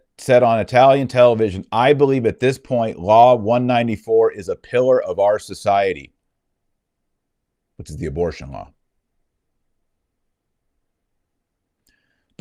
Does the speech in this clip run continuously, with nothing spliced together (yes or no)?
yes